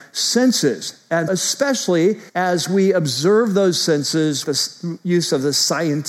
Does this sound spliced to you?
yes; 3 cuts; at 1.3 s, 2.3 s, 4.4 s

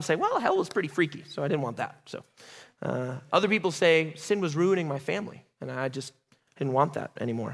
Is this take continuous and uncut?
yes; 0 cuts

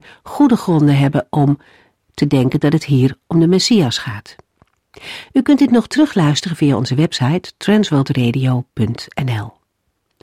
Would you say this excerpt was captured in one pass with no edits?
yes; 0 cuts

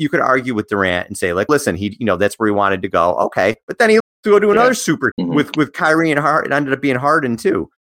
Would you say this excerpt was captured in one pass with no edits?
no; 3 cuts; at 1.5 s, 4.0 s, 5.1 s

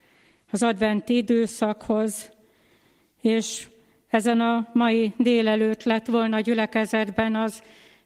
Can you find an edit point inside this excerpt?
no; 0 cuts

